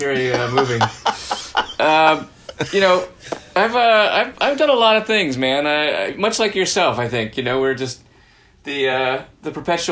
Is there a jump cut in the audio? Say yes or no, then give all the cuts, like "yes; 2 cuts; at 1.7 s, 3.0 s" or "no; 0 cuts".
no; 0 cuts